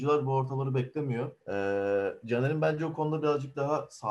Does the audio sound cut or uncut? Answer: cut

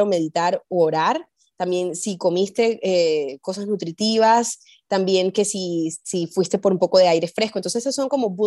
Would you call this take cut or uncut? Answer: uncut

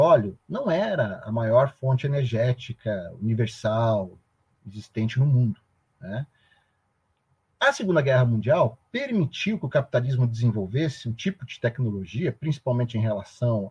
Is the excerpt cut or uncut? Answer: uncut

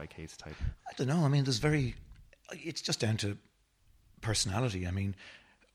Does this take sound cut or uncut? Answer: uncut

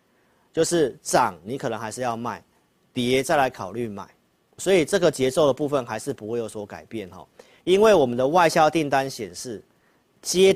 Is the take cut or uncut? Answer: cut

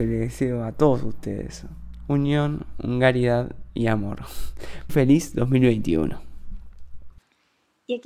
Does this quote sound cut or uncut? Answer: cut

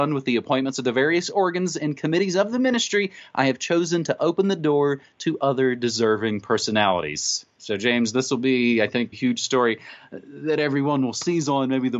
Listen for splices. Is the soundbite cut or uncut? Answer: cut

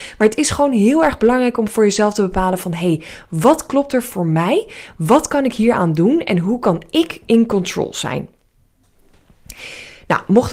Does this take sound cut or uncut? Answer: uncut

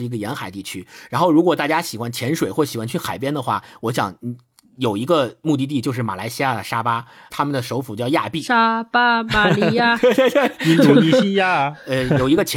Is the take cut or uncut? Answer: cut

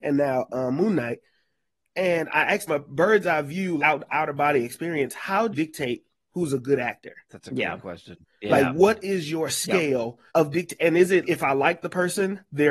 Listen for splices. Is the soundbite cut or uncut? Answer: cut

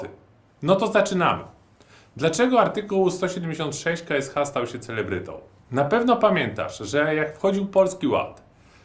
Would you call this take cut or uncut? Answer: uncut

